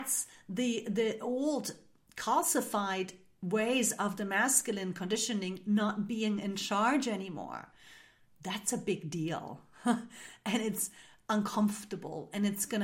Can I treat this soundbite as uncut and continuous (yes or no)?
yes